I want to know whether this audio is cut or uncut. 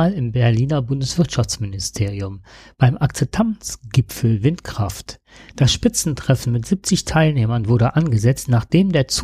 uncut